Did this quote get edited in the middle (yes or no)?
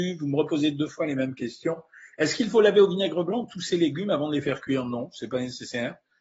no